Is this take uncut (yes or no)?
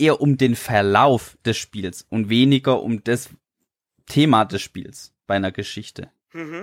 yes